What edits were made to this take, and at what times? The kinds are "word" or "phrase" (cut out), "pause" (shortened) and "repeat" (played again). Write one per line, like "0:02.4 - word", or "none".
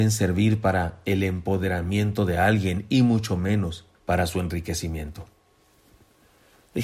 0:03.9 - pause